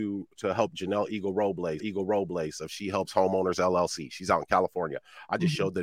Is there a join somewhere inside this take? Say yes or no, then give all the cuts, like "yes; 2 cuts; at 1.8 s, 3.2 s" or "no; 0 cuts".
yes; 1 cut; at 1.8 s